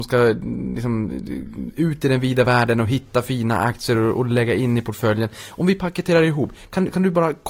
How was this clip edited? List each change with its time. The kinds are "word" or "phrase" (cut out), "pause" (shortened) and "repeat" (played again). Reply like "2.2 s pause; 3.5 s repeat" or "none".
none